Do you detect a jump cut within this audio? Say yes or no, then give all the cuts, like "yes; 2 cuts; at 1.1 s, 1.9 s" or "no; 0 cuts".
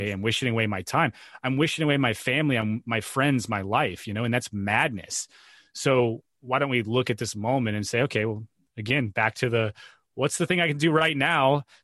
no; 0 cuts